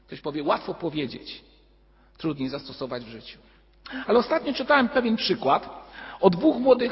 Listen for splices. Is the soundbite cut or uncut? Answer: uncut